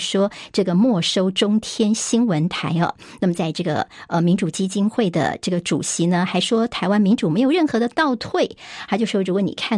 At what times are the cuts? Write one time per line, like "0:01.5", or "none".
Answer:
none